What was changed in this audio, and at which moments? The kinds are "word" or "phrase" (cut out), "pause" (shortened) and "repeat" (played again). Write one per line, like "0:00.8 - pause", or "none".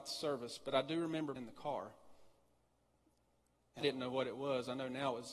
0:01.4 - word
0:03.8 - word